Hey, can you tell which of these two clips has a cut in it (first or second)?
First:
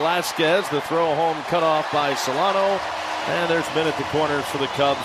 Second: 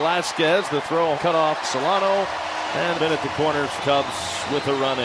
second